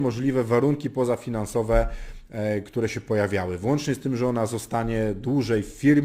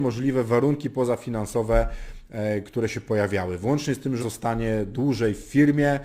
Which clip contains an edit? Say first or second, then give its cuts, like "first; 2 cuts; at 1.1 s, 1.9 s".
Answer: second; 1 cut; at 4.2 s